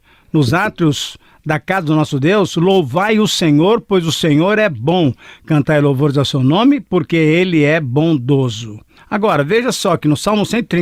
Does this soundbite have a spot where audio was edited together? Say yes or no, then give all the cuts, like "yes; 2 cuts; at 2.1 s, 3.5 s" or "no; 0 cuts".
no; 0 cuts